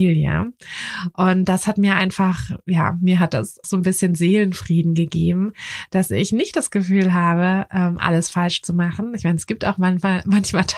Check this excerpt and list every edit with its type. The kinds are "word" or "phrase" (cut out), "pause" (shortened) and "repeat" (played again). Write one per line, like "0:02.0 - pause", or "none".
0:03.6 - word